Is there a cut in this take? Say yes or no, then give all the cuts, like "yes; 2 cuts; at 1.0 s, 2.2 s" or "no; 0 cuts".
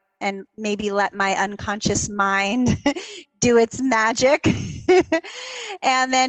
no; 0 cuts